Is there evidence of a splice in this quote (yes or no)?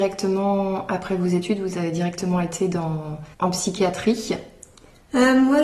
yes